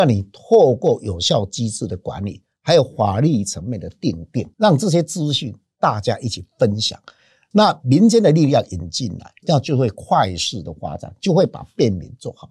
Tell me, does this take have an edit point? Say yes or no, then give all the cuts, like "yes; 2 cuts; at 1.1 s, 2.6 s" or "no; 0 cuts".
yes; 1 cut; at 4.5 s